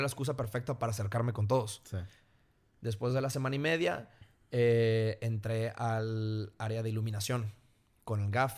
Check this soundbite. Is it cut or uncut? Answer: uncut